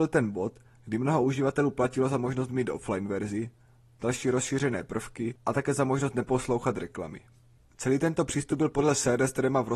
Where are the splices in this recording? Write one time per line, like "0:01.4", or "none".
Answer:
none